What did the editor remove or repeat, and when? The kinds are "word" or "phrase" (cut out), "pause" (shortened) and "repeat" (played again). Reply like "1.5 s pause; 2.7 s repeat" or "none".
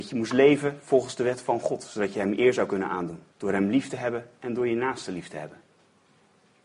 3.3 s pause; 4.4 s pause